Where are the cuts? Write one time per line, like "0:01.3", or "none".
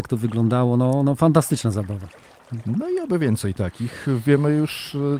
none